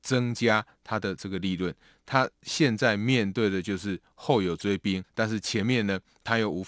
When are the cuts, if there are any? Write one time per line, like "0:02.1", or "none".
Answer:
0:05.1